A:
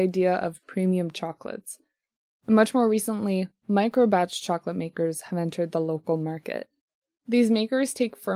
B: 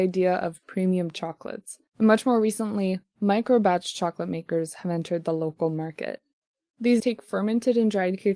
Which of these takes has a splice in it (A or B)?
B